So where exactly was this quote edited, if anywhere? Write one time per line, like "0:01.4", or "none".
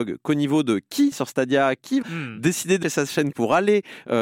0:01.1
0:02.0
0:02.8
0:03.3